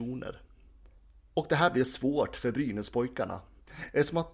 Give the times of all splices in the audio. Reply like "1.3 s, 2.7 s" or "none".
none